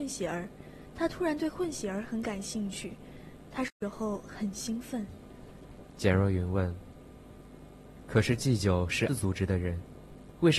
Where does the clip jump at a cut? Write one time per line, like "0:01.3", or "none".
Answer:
0:09.1